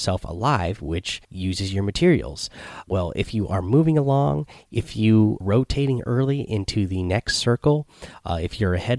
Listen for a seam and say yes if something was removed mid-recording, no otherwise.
yes